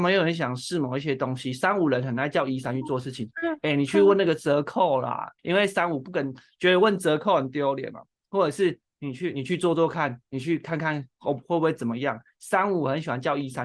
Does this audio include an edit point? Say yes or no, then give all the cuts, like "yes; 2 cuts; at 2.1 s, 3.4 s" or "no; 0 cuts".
yes; 1 cut; at 5.4 s